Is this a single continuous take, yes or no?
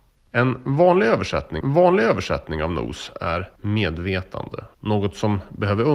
no